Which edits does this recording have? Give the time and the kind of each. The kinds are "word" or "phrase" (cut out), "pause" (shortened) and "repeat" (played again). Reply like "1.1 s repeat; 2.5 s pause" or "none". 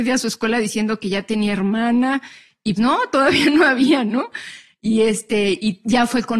2.8 s word